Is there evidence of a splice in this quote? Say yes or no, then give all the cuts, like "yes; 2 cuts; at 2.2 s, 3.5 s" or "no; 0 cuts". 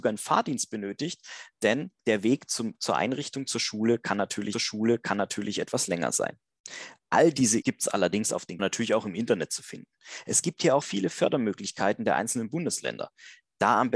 yes; 5 cuts; at 2.0 s, 4.5 s, 7.6 s, 8.6 s, 10.8 s